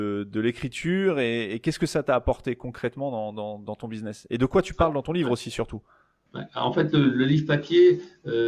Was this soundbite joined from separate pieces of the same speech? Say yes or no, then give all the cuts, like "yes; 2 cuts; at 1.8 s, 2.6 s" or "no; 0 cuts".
no; 0 cuts